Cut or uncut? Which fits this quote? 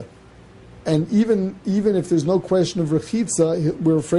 uncut